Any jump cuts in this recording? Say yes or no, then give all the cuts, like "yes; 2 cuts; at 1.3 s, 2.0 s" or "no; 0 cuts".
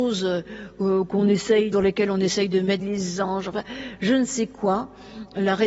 yes; 2 cuts; at 1.7 s, 2.8 s